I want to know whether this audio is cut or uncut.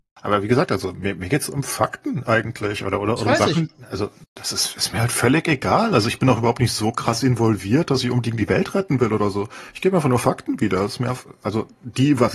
uncut